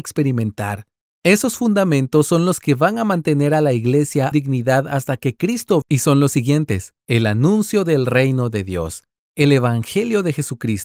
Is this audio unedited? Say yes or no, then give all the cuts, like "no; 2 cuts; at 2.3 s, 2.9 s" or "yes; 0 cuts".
no; 3 cuts; at 4.3 s, 5.8 s, 7.0 s